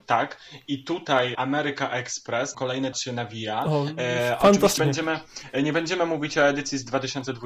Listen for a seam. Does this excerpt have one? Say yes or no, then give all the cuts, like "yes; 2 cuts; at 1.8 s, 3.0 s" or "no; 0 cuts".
yes; 4 cuts; at 1.3 s, 2.5 s, 2.9 s, 4.8 s